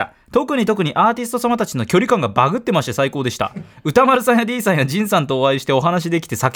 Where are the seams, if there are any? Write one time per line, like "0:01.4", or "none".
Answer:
none